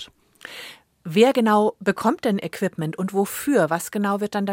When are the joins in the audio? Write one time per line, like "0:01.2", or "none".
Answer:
none